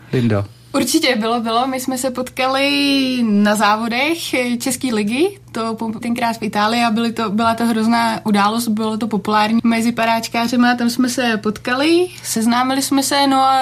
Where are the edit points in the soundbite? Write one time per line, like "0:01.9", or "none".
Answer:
0:06.0
0:09.6